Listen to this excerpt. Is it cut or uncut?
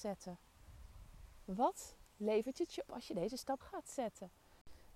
cut